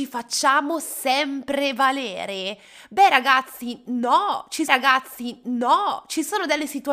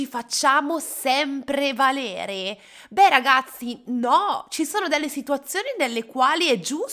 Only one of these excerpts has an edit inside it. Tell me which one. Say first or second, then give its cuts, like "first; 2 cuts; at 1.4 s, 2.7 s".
first; 1 cut; at 4.7 s